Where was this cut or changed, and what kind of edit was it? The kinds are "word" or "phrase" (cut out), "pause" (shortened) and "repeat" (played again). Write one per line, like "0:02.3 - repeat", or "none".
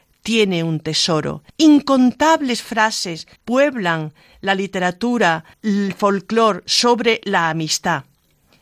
0:01.5 - pause
0:03.4 - pause
0:05.5 - pause